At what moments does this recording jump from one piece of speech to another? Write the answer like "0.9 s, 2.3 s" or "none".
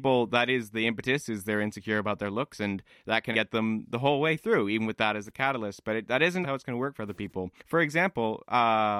3.3 s, 6.4 s, 7.6 s

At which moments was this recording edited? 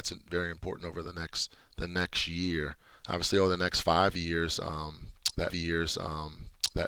1.6 s, 2.9 s, 5.5 s

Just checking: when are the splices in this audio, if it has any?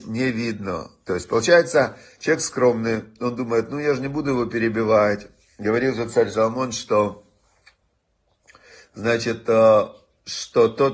none

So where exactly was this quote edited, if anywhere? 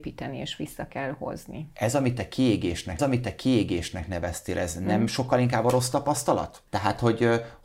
3.0 s, 6.7 s

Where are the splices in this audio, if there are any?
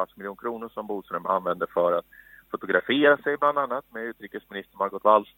none

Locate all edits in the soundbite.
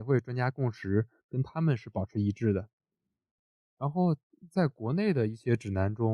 none

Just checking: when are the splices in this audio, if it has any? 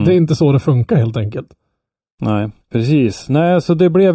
2.6 s

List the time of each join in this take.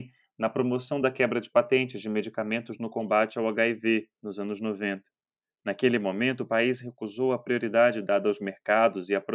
none

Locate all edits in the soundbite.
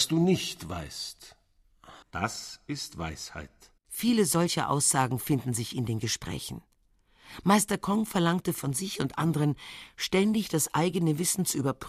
2.0 s, 3.8 s

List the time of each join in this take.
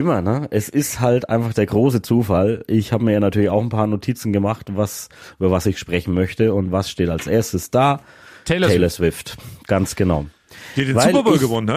none

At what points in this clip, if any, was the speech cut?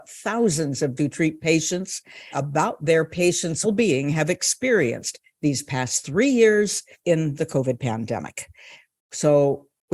1.0 s, 2.3 s, 3.6 s, 6.9 s

